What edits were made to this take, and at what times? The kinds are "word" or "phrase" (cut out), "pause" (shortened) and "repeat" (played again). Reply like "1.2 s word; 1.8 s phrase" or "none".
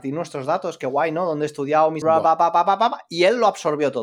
2.0 s word